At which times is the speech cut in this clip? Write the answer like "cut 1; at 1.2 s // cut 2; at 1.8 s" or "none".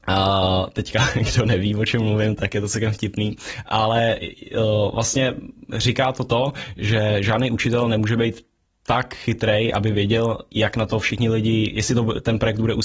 none